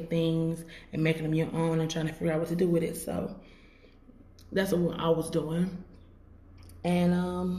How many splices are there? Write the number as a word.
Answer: zero